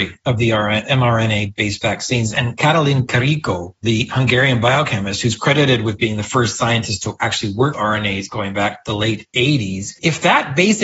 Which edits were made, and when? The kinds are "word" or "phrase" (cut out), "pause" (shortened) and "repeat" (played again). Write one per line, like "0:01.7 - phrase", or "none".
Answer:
0:07.7 - word